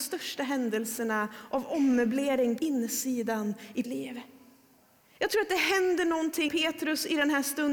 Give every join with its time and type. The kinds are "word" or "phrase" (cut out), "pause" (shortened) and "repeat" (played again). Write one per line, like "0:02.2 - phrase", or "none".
0:02.6 - word
0:03.8 - word
0:06.5 - word